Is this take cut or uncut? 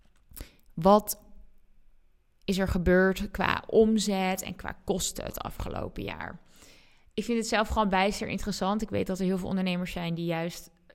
uncut